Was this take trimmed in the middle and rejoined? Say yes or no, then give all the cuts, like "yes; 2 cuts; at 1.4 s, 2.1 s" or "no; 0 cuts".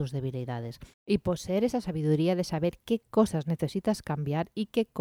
yes; 1 cut; at 0.9 s